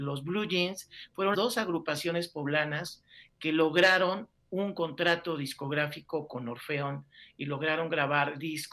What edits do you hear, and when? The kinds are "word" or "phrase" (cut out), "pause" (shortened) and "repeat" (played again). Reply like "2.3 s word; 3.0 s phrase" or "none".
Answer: 1.3 s word